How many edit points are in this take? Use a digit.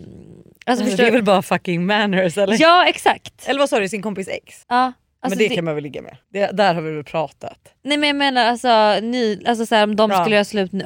3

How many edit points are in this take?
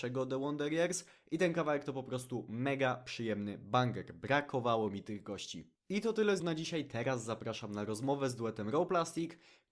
1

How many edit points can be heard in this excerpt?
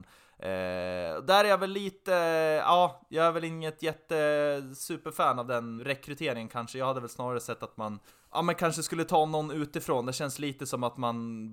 2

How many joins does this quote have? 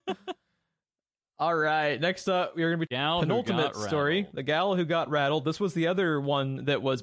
1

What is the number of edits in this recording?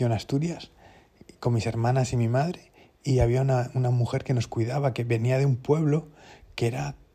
0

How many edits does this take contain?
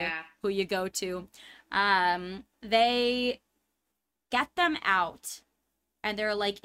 1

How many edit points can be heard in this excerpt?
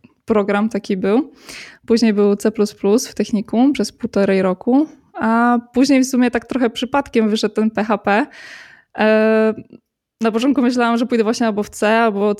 0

